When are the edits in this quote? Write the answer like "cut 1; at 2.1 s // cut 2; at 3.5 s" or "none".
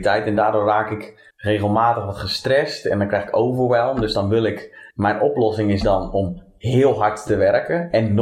cut 1; at 1.3 s // cut 2; at 4.9 s